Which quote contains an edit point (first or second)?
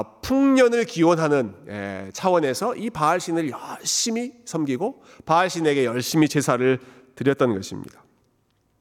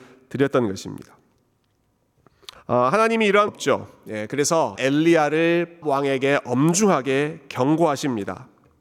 second